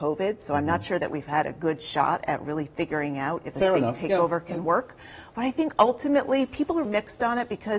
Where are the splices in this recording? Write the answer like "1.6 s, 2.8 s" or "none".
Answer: 6.8 s